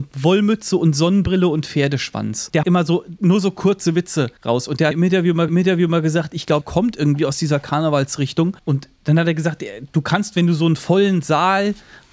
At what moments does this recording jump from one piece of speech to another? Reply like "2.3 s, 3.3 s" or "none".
2.6 s, 4.4 s, 4.9 s, 5.5 s, 6.6 s, 8.6 s